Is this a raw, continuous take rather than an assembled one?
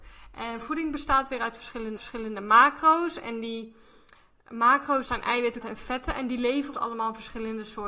no; 4 cuts; at 2.0 s, 5.1 s, 5.6 s, 6.7 s

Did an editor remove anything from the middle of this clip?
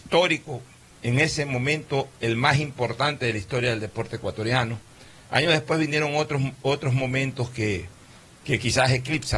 no; 0 cuts

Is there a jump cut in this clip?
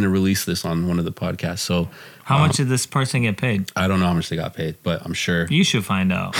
no; 0 cuts

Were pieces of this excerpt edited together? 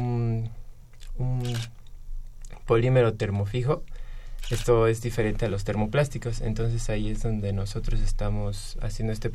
no; 0 cuts

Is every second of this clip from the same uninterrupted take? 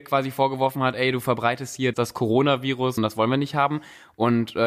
no; 2 cuts; at 1.9 s, 3.0 s

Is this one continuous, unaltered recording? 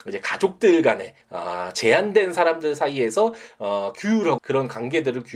no; 2 cuts; at 1.2 s, 4.4 s

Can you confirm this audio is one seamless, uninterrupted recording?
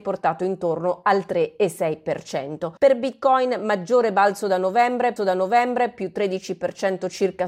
no; 2 cuts; at 2.8 s, 5.2 s

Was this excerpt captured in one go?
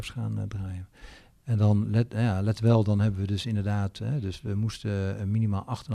yes; 0 cuts

